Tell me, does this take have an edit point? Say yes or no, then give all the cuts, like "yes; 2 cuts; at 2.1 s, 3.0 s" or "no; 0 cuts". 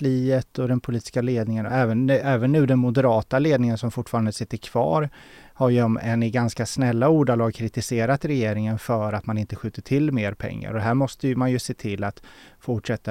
no; 0 cuts